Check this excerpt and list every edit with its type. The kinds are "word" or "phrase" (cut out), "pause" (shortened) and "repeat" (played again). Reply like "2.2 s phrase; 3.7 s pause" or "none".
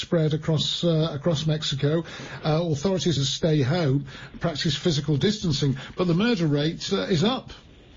3.2 s phrase; 6.9 s word